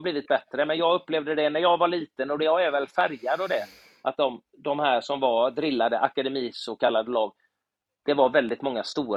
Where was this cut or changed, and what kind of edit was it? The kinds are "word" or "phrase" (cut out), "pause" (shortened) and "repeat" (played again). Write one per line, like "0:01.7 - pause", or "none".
none